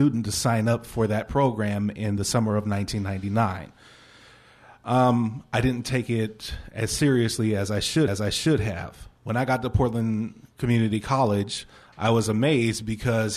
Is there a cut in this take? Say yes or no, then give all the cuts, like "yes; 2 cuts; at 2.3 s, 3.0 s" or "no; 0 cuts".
yes; 1 cut; at 8.1 s